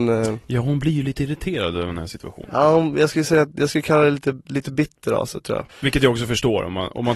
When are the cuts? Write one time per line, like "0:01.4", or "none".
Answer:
0:05.7